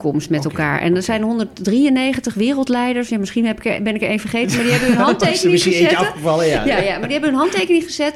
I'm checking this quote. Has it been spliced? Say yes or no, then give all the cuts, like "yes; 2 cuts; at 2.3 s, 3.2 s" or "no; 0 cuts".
no; 0 cuts